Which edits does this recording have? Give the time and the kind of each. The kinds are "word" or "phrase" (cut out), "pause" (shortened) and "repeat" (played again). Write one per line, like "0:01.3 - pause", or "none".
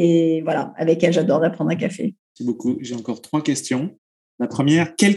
none